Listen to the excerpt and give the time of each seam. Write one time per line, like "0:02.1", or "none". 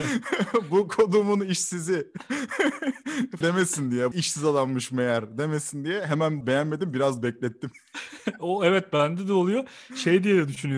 0:03.4
0:04.1
0:06.4

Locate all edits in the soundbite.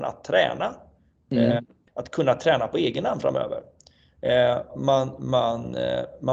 0:01.9
0:04.7

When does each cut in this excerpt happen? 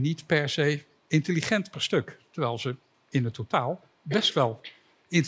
none

